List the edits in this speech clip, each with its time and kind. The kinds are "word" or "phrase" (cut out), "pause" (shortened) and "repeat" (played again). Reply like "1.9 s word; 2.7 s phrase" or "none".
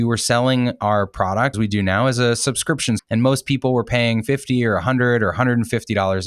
1.5 s word; 3.0 s word